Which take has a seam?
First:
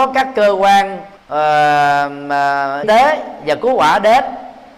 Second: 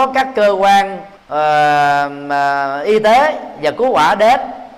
first; 1 cut; at 2.8 s

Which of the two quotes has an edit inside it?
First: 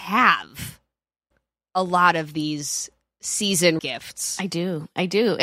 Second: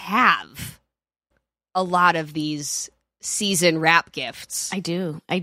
first; 1 cut; at 3.8 s

